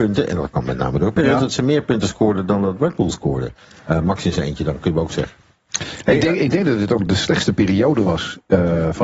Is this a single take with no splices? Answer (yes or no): yes